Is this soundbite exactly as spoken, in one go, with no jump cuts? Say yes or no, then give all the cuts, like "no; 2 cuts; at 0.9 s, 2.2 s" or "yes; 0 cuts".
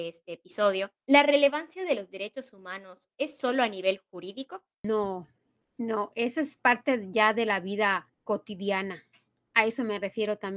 no; 3 cuts; at 1.0 s, 5.6 s, 8.1 s